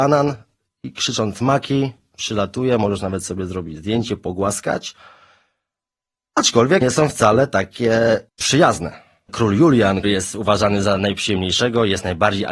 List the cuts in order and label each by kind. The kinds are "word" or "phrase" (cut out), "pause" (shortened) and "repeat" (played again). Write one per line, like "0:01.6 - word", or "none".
0:06.8 - word
0:10.0 - word